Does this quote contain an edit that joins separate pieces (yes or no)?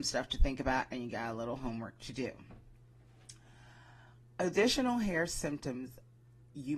no